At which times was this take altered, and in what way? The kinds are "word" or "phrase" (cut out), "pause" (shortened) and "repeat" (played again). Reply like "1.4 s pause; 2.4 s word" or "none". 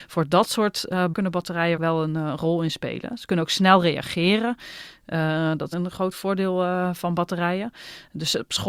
1.1 s phrase; 1.8 s word; 5.7 s word